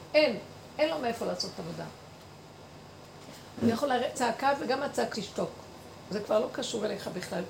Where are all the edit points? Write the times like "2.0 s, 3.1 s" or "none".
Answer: 4.1 s, 5.1 s